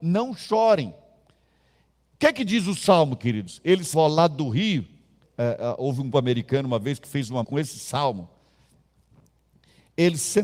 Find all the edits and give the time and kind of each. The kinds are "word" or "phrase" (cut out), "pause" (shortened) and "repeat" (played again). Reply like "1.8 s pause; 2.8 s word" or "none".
3.9 s word; 5.2 s word; 6.1 s word; 7.4 s word